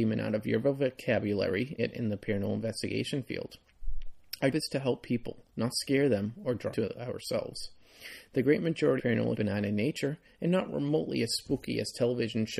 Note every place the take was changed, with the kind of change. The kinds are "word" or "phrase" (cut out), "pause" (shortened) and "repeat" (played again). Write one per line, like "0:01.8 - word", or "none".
0:01.8 - phrase
0:04.5 - word
0:05.5 - pause
0:06.7 - word
0:09.0 - word
0:09.3 - phrase